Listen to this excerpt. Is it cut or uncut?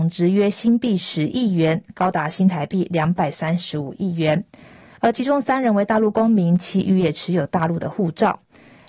uncut